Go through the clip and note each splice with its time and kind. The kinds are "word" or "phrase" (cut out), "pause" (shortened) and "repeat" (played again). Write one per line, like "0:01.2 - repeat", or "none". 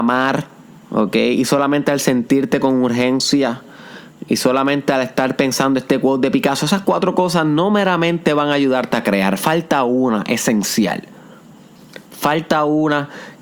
none